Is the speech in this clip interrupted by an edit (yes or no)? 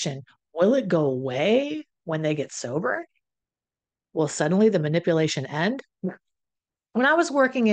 no